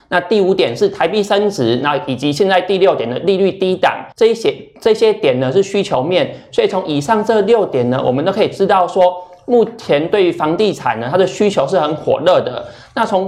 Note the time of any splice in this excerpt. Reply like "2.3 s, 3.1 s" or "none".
4.1 s